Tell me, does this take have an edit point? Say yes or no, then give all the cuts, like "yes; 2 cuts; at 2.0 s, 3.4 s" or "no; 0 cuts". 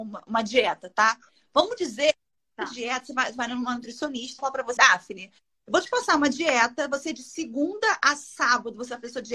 yes; 2 cuts; at 4.4 s, 4.8 s